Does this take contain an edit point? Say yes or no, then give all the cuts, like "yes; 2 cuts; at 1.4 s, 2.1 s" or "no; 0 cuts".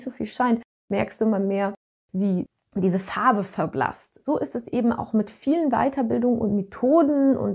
no; 0 cuts